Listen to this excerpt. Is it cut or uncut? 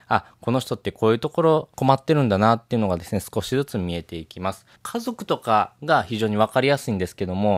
cut